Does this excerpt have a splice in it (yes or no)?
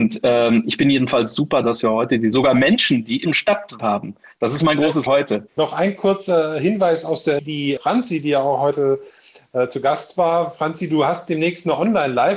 yes